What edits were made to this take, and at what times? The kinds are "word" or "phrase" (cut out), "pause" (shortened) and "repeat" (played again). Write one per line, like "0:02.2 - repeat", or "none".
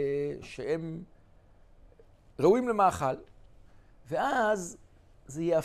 none